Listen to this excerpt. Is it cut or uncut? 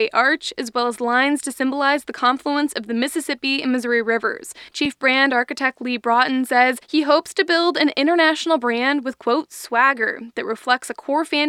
cut